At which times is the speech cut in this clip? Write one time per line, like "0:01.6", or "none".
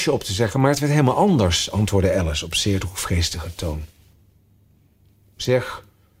none